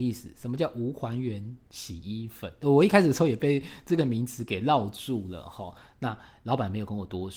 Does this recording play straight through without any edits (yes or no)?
no